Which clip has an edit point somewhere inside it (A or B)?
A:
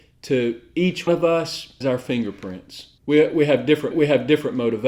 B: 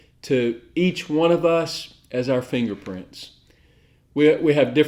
A